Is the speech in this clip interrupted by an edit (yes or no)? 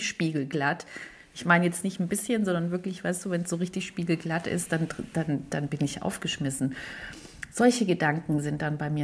no